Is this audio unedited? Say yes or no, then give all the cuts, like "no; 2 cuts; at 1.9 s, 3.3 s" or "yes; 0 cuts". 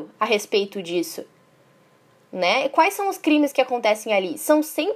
yes; 0 cuts